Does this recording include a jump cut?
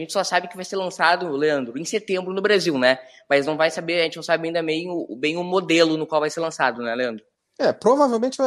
no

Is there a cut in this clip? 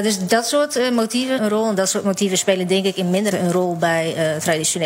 yes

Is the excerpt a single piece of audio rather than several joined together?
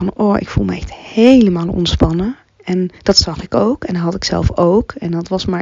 no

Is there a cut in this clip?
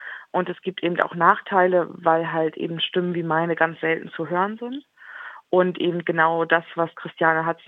no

